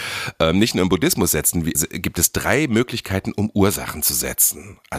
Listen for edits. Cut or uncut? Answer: cut